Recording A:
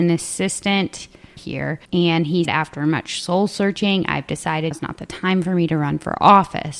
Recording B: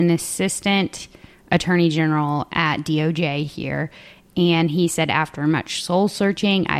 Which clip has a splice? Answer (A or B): A